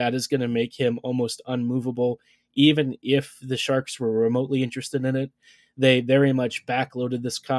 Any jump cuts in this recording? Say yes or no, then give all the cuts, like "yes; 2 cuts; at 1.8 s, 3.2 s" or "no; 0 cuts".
no; 0 cuts